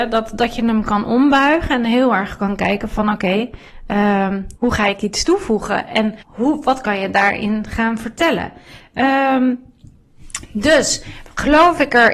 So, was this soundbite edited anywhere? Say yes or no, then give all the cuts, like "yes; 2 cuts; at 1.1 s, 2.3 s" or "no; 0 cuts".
yes; 2 cuts; at 4.6 s, 6.2 s